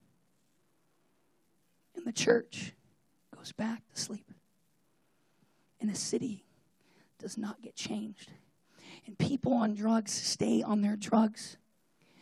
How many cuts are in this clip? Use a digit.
1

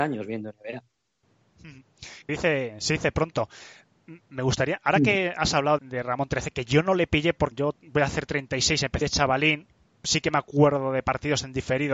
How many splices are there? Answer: 4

